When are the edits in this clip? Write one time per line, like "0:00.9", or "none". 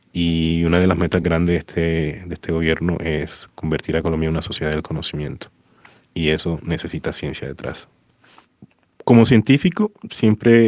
none